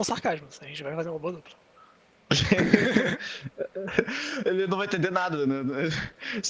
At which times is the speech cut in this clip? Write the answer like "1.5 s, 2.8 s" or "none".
none